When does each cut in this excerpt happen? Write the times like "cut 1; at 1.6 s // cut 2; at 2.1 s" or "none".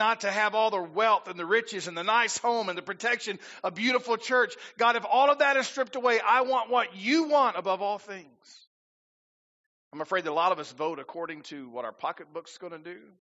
none